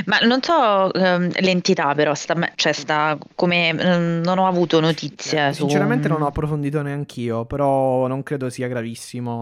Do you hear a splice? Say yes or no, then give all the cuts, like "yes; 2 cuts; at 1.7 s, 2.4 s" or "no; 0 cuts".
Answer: no; 0 cuts